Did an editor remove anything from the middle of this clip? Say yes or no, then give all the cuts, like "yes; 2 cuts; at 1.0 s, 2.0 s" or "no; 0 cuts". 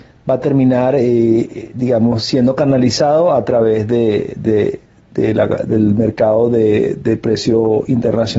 no; 0 cuts